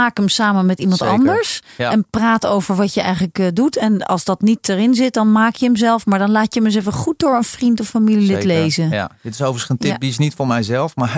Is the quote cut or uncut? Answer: uncut